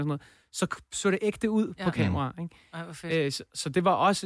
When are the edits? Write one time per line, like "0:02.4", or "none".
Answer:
none